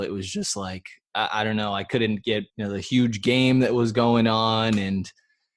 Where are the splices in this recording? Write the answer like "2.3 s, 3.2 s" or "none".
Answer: 2.5 s